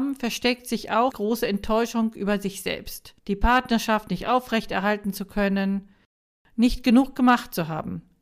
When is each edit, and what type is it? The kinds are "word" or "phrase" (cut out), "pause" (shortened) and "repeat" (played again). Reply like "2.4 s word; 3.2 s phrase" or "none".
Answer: 1.1 s word; 3.2 s pause